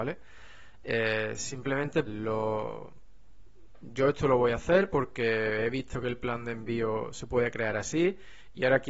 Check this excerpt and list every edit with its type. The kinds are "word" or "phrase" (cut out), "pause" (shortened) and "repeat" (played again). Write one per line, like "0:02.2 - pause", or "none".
0:02.1 - word